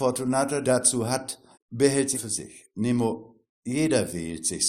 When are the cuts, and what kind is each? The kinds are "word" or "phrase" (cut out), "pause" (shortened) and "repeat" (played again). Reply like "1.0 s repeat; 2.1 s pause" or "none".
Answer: 1.5 s pause; 2.1 s word; 3.5 s pause